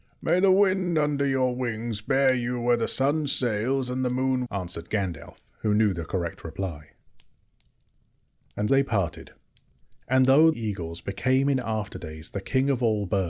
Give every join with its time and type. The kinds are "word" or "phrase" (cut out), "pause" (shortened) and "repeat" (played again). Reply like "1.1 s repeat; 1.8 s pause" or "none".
4.5 s word; 8.7 s word; 10.0 s pause; 10.5 s phrase